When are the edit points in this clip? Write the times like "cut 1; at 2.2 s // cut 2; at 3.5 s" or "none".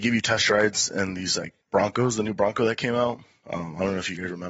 cut 1; at 1.6 s